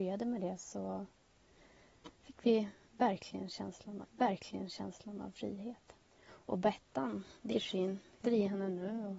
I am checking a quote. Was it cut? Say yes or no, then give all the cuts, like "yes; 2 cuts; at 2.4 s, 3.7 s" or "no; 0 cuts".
yes; 5 cuts; at 2.1 s, 4.0 s, 6.0 s, 7.5 s, 8.2 s